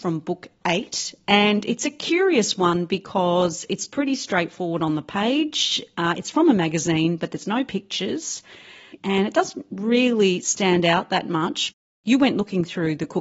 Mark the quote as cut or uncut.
uncut